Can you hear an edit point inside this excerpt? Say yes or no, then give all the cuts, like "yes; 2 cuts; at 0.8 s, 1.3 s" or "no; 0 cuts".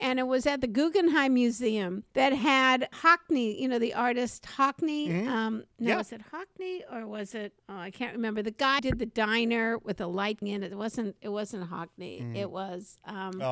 yes; 6 cuts; at 2.1 s, 2.9 s, 5.7 s, 7.6 s, 8.8 s, 10.4 s